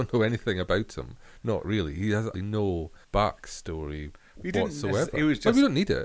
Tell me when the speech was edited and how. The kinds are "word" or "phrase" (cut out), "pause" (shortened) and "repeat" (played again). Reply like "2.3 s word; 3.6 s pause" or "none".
1.6 s word; 2.3 s word; 3.0 s pause